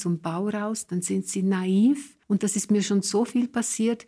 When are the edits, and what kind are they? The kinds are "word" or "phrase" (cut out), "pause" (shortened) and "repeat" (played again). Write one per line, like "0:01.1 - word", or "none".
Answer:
0:02.2 - pause